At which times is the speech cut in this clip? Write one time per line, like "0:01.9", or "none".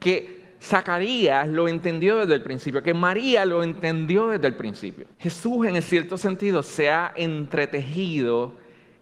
0:05.1

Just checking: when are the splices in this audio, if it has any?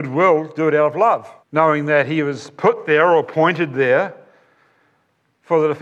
0:01.4

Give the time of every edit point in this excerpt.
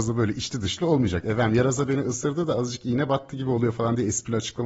none

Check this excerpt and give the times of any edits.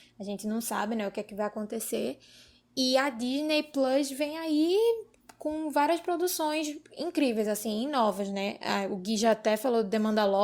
none

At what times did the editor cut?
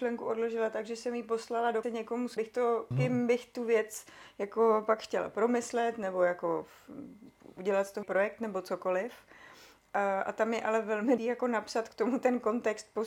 0:01.8
0:02.4
0:02.9
0:08.0
0:11.2

